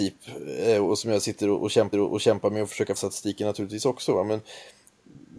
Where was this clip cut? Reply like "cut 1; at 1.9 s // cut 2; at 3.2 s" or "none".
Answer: cut 1; at 1.9 s // cut 2; at 3.0 s